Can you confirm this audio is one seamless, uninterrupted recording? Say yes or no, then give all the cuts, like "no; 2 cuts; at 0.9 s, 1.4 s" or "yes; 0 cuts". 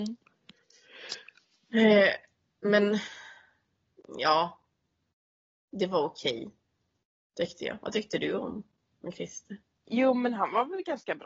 yes; 0 cuts